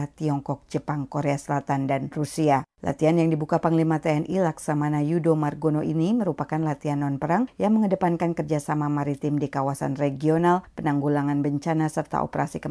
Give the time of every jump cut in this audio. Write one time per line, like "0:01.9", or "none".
0:02.7

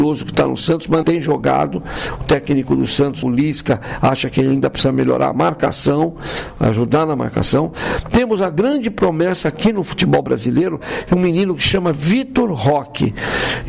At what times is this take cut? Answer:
0:01.0
0:03.2

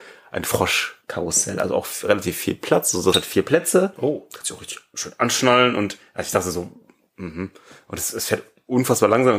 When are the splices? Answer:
0:03.1

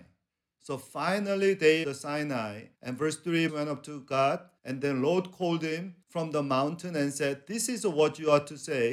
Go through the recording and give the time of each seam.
0:01.8
0:02.7
0:03.5
0:04.6
0:06.0

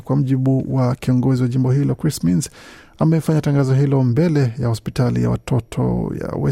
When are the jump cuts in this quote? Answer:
none

